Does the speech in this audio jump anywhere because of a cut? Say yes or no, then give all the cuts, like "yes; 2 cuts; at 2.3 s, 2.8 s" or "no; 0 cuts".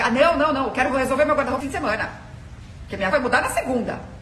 yes; 2 cuts; at 1.6 s, 3.1 s